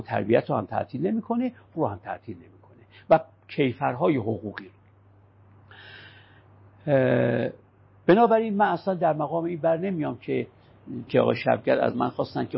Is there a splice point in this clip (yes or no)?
yes